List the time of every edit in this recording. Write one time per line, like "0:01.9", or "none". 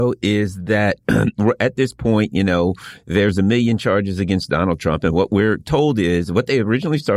none